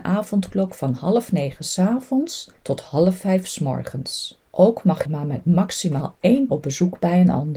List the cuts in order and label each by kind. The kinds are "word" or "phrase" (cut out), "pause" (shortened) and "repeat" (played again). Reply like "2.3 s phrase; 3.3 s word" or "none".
2.6 s pause; 4.5 s pause; 5.1 s phrase; 6.5 s word